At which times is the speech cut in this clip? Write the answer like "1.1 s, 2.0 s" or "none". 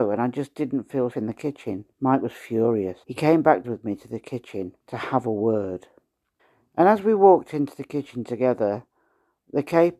1.1 s, 1.9 s, 3.0 s, 3.6 s, 4.8 s, 6.4 s